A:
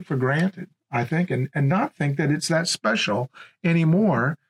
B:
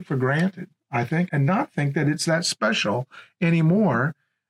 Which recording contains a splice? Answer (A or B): B